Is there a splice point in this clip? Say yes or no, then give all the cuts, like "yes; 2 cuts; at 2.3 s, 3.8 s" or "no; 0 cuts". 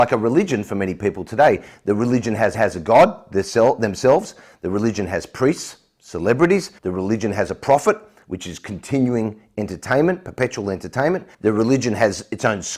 yes; 3 cuts; at 2.5 s, 6.8 s, 11.3 s